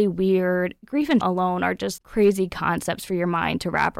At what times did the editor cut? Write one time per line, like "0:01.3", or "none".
0:01.2
0:02.0

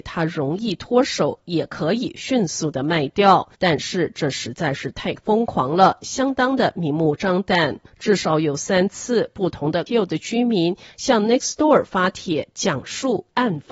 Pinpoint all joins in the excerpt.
0:03.5
0:07.9
0:09.9

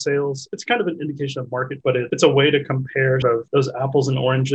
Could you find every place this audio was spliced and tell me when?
0:01.8
0:03.2

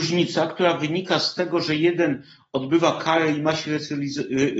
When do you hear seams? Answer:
none

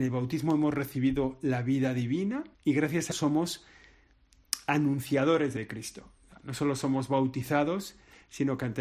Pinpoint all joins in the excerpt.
0:02.5
0:03.1
0:05.6

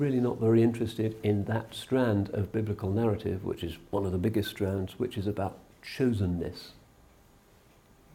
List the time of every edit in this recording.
none

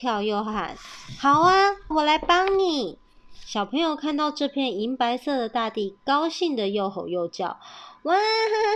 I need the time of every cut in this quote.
0:01.9

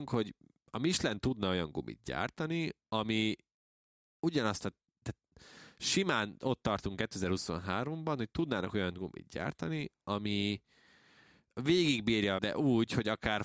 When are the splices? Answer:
0:12.4

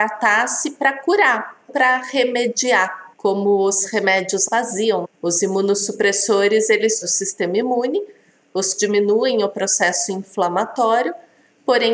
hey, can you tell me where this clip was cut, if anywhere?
0:01.7
0:03.1
0:04.5
0:07.0
0:08.8

